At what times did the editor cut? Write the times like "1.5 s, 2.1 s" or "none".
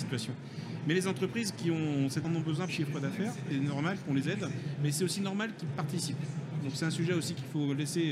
2.2 s, 2.7 s, 3.5 s